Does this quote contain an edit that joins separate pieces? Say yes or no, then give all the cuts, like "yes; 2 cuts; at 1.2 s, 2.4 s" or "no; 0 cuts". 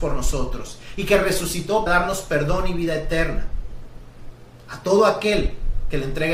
yes; 1 cut; at 1.9 s